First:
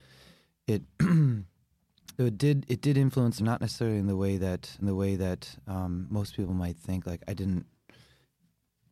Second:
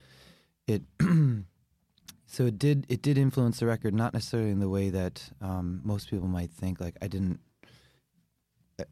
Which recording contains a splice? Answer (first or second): first